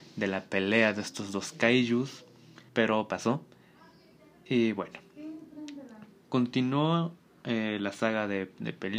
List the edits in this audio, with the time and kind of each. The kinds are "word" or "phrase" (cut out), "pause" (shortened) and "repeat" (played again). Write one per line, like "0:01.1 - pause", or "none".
0:02.7 - pause